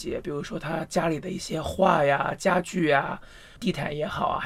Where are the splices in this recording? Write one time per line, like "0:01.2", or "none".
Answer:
0:03.6